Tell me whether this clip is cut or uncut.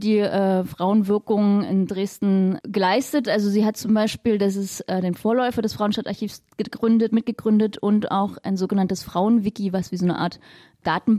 uncut